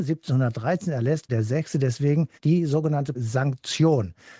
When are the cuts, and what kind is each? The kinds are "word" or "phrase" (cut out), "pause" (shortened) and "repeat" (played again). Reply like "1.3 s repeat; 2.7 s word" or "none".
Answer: 1.3 s word; 2.4 s pause; 3.1 s word